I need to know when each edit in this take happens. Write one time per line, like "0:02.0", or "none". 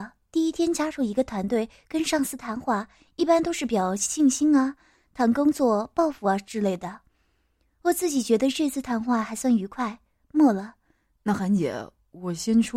none